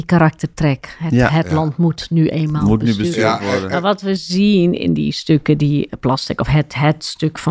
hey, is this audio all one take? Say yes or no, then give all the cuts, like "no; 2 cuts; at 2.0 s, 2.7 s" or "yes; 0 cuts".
yes; 0 cuts